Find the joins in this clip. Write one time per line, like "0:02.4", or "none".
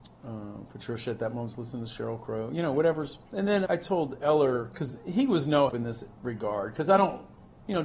0:03.3
0:03.7
0:05.7